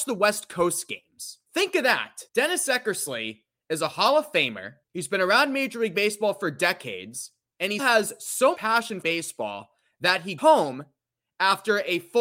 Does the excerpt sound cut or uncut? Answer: cut